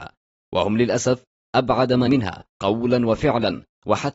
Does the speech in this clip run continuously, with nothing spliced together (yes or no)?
no